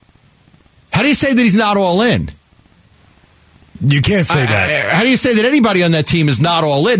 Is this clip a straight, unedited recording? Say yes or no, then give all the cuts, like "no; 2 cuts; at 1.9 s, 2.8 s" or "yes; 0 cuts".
yes; 0 cuts